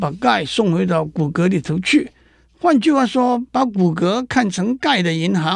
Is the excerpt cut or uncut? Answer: uncut